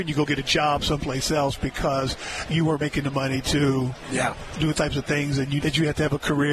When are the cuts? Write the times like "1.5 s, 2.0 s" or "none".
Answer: 4.7 s, 5.6 s

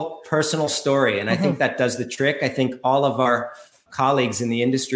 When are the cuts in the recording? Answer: 3.9 s

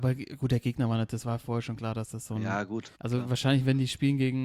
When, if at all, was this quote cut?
2.9 s

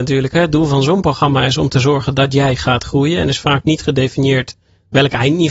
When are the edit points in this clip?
none

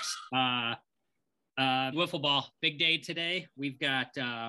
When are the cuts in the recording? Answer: 1.9 s

